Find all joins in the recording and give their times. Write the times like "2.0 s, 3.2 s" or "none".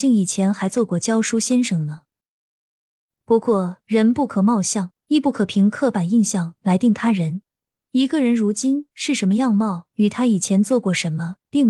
5.0 s